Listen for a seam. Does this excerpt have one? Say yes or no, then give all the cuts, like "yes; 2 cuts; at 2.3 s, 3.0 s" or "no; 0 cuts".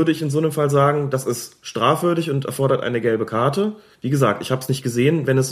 no; 0 cuts